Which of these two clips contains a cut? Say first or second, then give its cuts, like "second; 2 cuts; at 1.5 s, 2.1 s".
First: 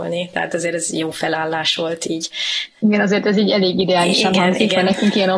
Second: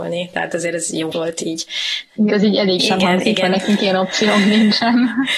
second; 3 cuts; at 1.1 s, 2.3 s, 2.8 s